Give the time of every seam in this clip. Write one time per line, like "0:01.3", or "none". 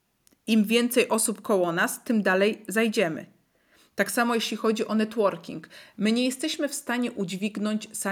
none